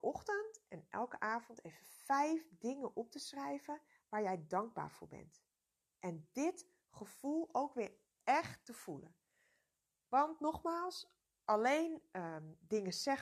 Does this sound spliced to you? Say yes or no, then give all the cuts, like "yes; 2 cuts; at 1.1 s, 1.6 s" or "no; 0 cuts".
no; 0 cuts